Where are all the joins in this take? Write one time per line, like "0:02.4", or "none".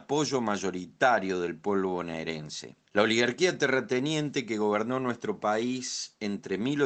0:02.8